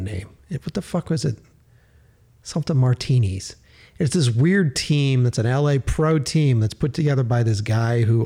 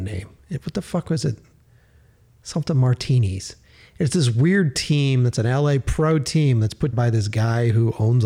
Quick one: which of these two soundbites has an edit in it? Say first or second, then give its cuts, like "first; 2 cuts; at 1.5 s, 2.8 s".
second; 1 cut; at 6.9 s